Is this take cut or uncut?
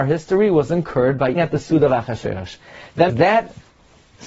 cut